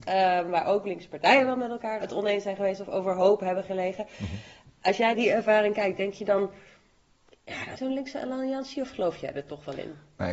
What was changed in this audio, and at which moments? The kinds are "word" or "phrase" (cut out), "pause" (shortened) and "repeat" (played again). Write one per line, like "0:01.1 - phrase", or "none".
0:02.0 - word
0:05.1 - word
0:07.8 - phrase